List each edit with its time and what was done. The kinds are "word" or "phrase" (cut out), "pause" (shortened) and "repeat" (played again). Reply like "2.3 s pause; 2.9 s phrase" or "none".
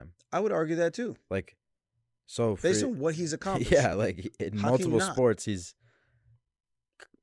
none